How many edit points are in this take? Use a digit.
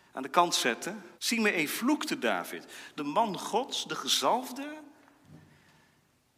2